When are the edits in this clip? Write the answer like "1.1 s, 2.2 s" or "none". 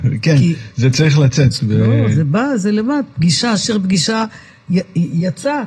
none